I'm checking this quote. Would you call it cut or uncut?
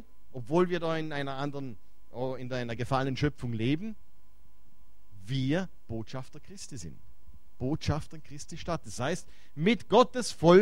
uncut